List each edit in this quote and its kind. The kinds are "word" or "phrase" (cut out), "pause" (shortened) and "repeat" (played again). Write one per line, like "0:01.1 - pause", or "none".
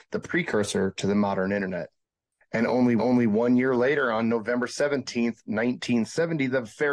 0:02.0 - pause
0:03.0 - repeat